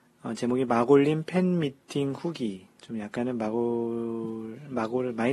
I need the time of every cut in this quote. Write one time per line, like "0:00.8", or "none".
none